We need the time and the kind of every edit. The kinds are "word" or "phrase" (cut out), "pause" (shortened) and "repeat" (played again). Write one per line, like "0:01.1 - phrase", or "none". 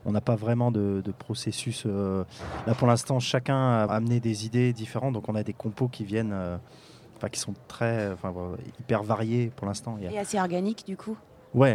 0:03.9 - word

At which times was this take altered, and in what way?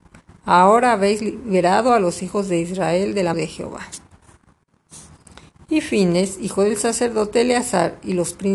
0:03.3 - word

